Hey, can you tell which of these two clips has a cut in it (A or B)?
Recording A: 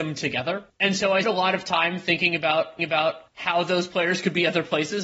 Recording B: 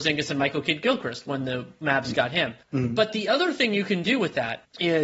A